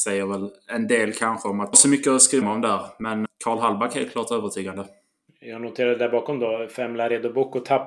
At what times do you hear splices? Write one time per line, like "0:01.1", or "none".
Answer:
0:01.7
0:02.4
0:03.3

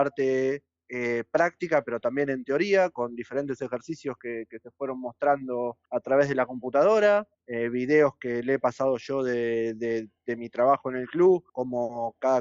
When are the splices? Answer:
0:05.9
0:07.3
0:11.5

